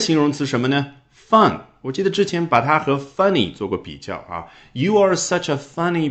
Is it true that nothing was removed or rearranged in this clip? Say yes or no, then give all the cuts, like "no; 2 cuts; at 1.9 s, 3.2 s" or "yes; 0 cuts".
yes; 0 cuts